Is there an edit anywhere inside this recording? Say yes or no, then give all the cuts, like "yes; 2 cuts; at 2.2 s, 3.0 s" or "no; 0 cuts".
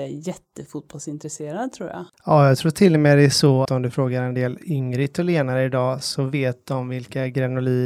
yes; 2 cuts; at 2.1 s, 3.6 s